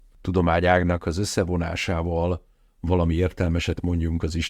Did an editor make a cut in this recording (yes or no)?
no